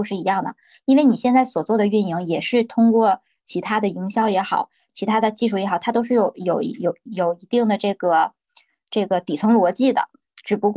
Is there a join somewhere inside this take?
no; 0 cuts

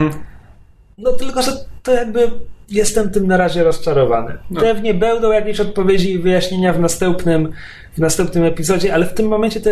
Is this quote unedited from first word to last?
no; 1 cut; at 2.6 s

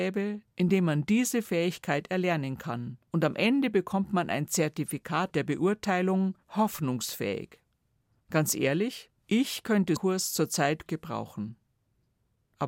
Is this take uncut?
no; 6 cuts; at 3.1 s, 5.3 s, 6.4 s, 9.2 s, 10.0 s, 10.9 s

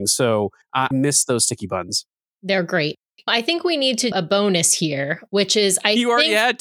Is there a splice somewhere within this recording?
yes; 3 cuts; at 0.9 s, 3.3 s, 4.1 s

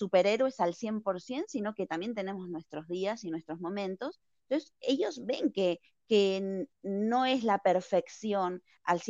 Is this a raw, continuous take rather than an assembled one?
yes; 0 cuts

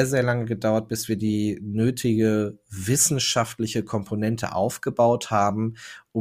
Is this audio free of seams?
yes; 0 cuts

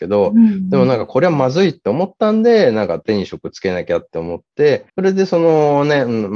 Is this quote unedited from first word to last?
no; 1 cut; at 4.9 s

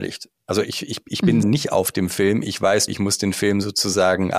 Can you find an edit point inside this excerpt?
yes; 2 cuts; at 1.4 s, 2.9 s

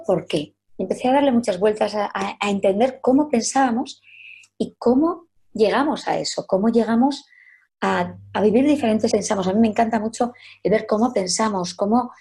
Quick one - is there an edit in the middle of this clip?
yes; 1 cut; at 9.1 s

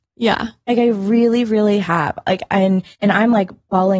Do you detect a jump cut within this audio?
yes; 1 cut; at 2.9 s

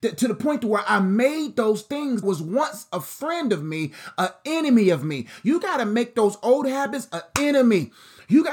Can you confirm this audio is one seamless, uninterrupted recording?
no; 1 cut; at 2.2 s

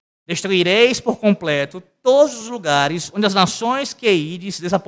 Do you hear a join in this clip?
no; 0 cuts

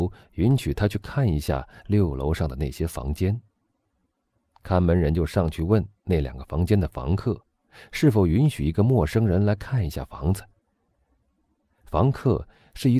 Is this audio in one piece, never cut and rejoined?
yes; 0 cuts

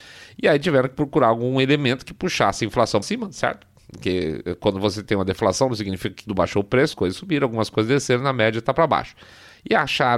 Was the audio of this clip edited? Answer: yes; 3 cuts; at 3.0 s, 6.3 s, 6.9 s

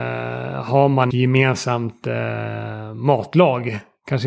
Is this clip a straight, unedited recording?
no; 1 cut; at 1.1 s

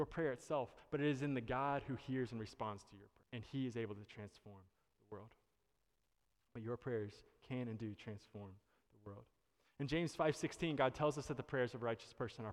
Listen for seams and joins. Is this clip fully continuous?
no; 1 cut; at 3.2 s

